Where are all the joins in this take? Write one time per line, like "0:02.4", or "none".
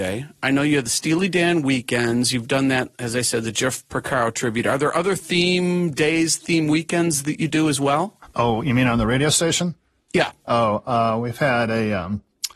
none